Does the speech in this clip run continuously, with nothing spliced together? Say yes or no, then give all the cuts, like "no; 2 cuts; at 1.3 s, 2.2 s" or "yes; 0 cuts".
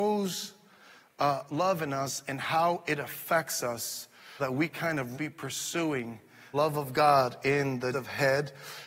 no; 6 cuts; at 1.5 s, 4.4 s, 4.7 s, 5.1 s, 6.5 s, 7.9 s